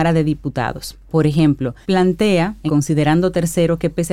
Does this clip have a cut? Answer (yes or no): yes